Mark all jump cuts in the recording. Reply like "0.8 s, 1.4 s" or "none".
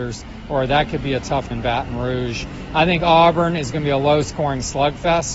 1.5 s